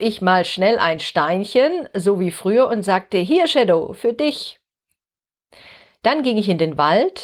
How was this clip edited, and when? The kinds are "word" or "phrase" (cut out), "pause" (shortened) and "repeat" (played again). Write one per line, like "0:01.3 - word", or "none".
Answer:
none